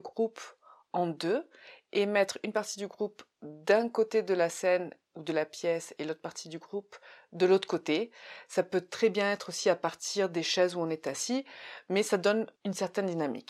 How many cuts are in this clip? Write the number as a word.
zero